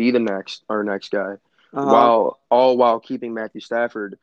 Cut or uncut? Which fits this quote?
uncut